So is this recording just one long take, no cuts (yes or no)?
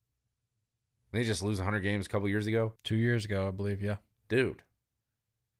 no